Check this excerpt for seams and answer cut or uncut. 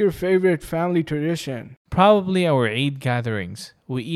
cut